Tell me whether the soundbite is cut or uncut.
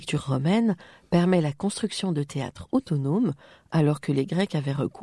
uncut